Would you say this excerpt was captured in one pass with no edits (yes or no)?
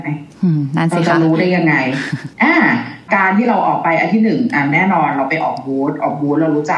no